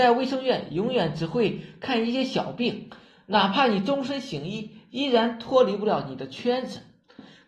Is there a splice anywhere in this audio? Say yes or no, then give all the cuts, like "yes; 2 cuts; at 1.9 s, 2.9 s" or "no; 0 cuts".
no; 0 cuts